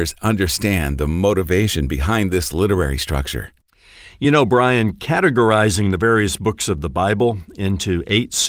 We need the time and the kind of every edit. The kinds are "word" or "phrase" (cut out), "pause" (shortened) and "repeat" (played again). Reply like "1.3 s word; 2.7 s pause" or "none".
none